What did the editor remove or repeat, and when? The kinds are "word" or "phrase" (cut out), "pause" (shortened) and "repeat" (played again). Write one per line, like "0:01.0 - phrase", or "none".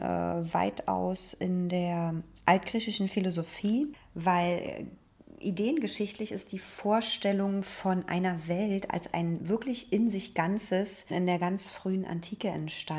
0:11.1 - word